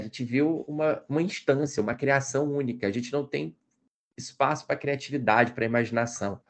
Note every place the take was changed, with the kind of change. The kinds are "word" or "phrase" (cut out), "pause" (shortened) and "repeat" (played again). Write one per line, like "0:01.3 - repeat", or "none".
none